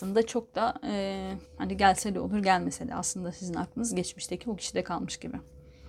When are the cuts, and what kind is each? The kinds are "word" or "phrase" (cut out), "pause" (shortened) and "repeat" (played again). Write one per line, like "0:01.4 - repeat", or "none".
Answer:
0:01.5 - pause